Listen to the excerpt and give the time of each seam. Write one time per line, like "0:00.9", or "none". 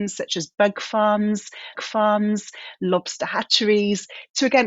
0:01.7